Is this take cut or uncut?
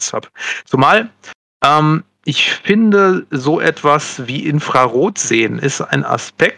uncut